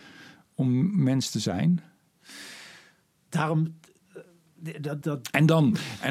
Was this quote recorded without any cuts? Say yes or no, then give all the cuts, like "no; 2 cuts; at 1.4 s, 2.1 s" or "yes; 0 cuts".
no; 1 cut; at 5.0 s